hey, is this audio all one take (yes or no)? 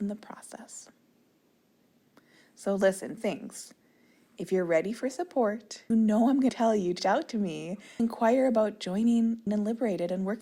no